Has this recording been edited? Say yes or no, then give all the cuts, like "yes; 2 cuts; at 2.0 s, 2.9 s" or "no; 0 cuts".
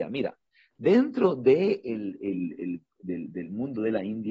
no; 0 cuts